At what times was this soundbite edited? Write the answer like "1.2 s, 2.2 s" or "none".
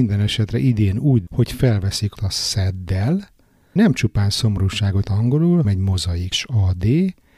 1.3 s, 2.1 s, 3.8 s, 5.0 s, 5.6 s, 6.3 s